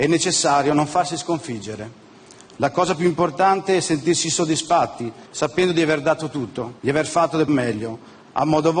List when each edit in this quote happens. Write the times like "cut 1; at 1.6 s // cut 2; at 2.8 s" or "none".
cut 1; at 5.3 s // cut 2; at 6.8 s // cut 3; at 7.5 s